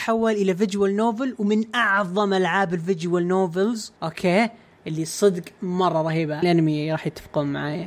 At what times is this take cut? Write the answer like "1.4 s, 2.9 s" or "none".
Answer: 4.0 s, 6.4 s